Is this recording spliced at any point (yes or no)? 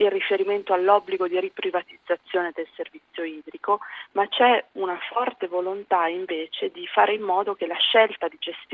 no